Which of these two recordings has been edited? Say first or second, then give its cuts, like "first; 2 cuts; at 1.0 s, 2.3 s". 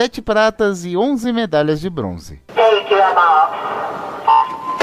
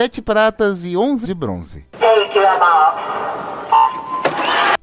second; 1 cut; at 1.2 s